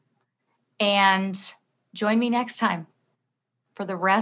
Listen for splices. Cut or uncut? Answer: uncut